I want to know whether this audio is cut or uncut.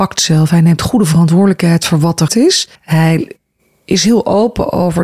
cut